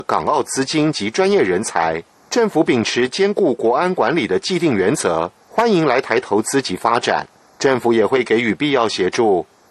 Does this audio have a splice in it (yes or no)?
no